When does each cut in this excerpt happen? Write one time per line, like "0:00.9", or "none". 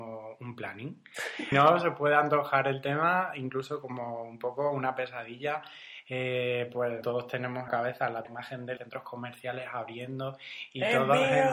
0:01.5
0:07.0
0:07.7
0:08.2
0:08.8